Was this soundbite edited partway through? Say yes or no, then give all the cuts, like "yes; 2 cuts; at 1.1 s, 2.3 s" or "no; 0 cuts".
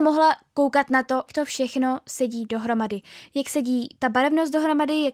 yes; 1 cut; at 1.3 s